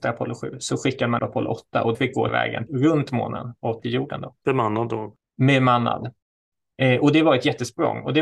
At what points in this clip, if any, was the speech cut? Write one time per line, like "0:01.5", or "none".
0:01.2
0:01.9
0:02.3
0:02.7
0:03.8

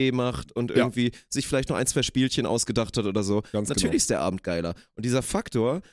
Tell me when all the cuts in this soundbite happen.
none

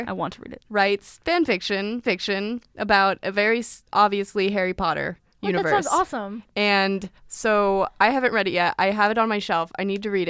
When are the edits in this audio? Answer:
0:02.0
0:03.9
0:05.3
0:07.2

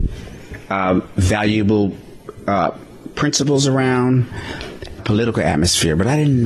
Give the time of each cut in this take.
0:05.0

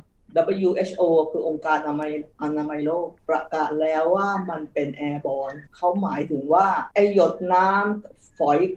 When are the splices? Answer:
0:03.2
0:05.7
0:06.9

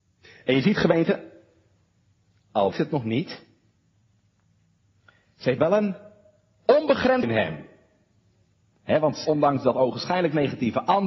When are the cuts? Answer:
0:02.7
0:05.6
0:07.2
0:09.2

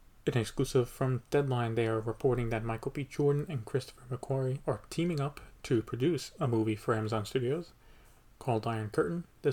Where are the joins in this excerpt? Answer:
none

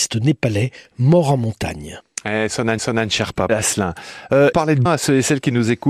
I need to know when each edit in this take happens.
0:02.8
0:03.5
0:04.5
0:04.9

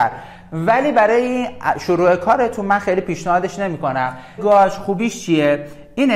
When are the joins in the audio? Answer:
0:04.4

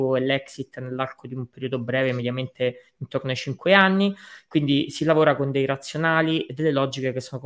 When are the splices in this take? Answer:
none

